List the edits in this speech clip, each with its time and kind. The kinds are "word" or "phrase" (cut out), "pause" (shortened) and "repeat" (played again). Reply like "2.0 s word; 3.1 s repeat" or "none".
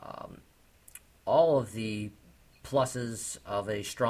none

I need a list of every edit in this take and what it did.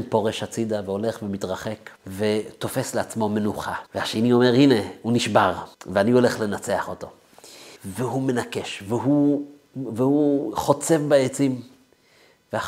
2.0 s pause; 3.9 s pause; 5.7 s pause; 7.8 s pause

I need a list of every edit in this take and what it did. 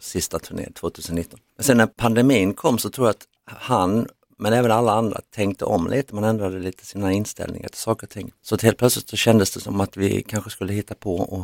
1.5 s pause; 1.9 s pause; 3.4 s pause; 8.4 s pause

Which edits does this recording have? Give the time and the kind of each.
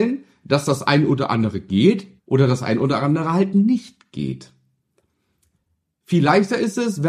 2.2 s pause

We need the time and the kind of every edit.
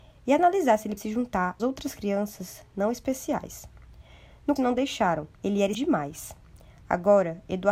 1.0 s word; 1.6 s word; 4.6 s word; 5.3 s pause; 5.7 s word

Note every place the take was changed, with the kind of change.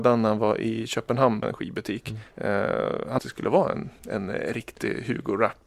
1.4 s word; 2.3 s pause; 3.2 s phrase; 4.0 s pause

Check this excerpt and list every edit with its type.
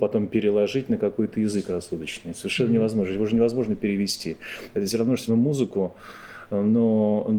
5.3 s word

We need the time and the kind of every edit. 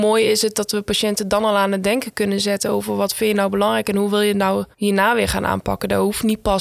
4.7 s pause

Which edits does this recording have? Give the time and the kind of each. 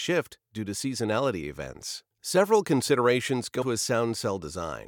2.1 s pause; 3.6 s word

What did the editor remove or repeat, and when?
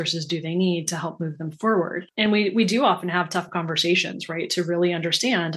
none

